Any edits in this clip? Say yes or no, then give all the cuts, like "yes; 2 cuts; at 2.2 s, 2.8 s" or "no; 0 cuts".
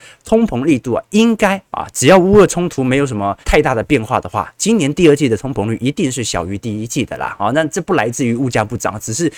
yes; 2 cuts; at 1.7 s, 3.4 s